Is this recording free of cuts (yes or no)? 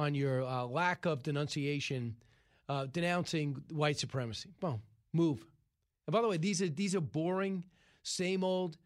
yes